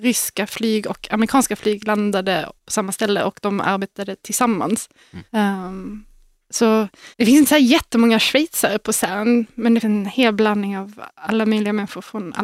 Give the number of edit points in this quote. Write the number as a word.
four